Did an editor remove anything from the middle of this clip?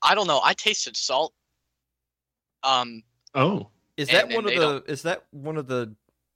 no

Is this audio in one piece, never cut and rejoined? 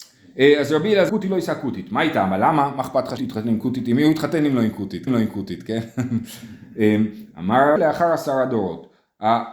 no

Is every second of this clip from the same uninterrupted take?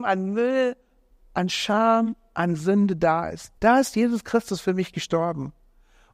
no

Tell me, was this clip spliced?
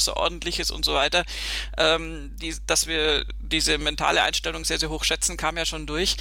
no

